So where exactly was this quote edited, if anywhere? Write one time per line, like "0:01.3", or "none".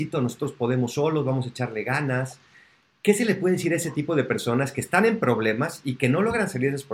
none